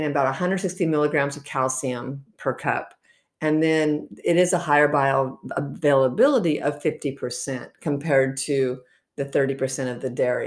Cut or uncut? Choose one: uncut